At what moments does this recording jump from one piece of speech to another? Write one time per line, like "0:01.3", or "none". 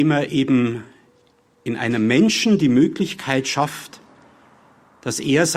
none